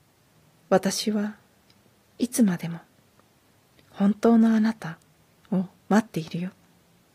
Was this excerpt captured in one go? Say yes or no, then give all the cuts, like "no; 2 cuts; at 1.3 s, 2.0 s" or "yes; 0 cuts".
yes; 0 cuts